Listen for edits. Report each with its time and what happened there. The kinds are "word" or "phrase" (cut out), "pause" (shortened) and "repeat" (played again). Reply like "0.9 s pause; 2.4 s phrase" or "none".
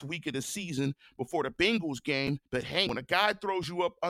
2.5 s pause; 2.9 s word